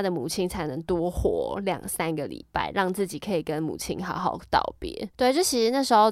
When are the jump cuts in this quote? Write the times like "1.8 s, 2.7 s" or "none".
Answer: 5.1 s